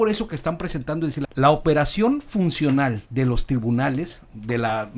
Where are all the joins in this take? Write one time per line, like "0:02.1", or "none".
0:01.2
0:03.1